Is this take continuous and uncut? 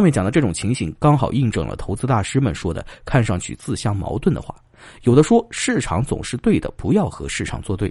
yes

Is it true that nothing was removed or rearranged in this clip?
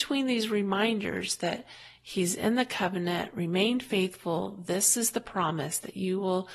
yes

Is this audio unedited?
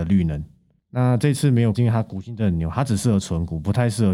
no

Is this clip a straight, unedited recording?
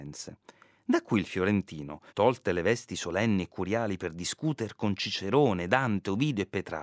no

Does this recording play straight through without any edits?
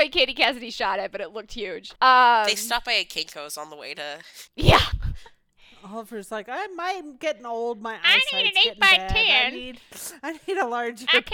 no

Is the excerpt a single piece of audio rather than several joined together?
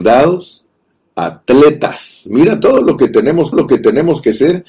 no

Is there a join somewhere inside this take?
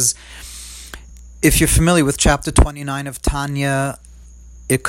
no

